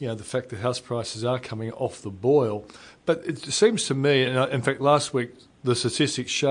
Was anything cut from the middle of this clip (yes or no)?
no